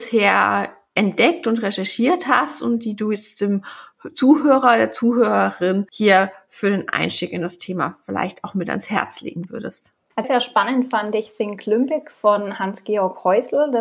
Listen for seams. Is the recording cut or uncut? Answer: cut